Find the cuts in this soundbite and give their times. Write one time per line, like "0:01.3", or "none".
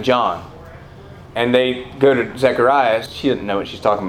0:01.3
0:03.1